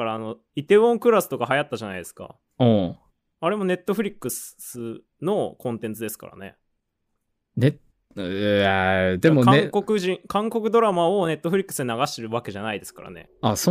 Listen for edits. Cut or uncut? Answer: uncut